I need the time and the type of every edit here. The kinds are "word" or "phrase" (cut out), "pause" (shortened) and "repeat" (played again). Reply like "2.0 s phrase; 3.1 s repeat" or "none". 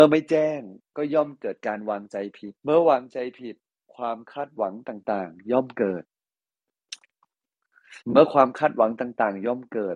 2.6 s pause; 8.0 s pause